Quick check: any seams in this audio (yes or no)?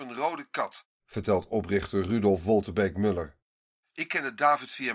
no